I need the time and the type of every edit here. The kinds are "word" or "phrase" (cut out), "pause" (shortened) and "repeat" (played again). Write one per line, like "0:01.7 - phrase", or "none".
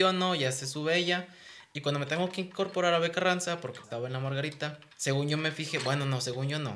0:03.8 - word
0:04.9 - pause